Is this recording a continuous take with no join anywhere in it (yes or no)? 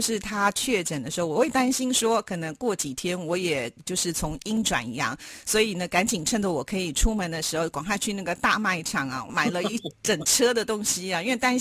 no